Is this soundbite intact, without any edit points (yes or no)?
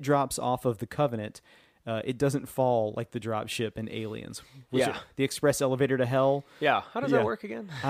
yes